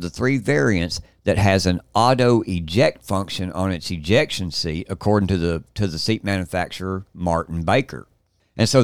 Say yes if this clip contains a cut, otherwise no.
no